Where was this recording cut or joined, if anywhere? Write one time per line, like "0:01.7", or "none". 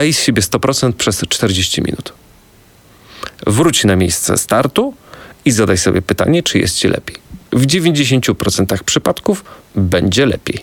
0:07.5
0:09.6